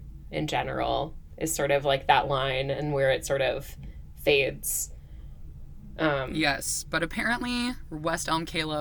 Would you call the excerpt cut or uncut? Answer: uncut